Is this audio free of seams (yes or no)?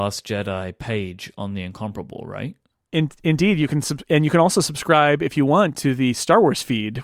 yes